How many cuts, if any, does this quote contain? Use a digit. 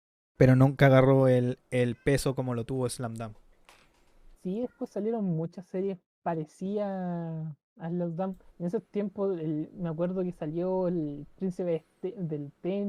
3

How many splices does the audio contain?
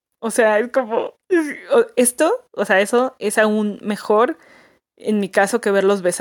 0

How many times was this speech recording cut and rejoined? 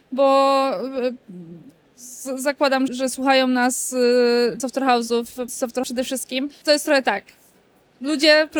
5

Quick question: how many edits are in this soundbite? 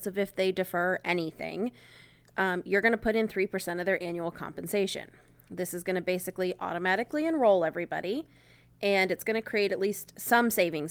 0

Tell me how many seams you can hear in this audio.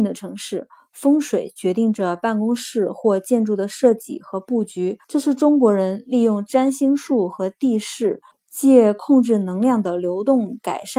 2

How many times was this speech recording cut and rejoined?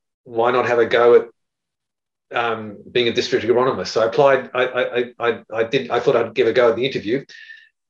0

